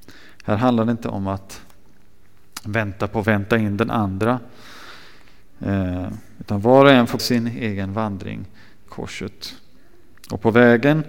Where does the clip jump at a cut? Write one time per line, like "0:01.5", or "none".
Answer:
0:03.2
0:07.2
0:08.9